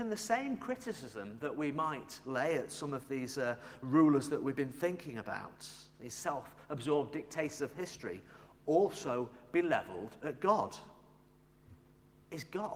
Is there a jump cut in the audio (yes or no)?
no